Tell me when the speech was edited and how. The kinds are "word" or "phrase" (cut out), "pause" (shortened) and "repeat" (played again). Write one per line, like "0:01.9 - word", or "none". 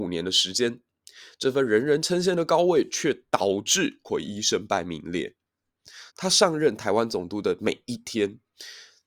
0:06.1 - pause